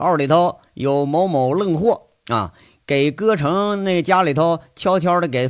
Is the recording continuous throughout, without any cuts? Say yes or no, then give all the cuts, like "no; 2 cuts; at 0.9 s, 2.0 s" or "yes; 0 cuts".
yes; 0 cuts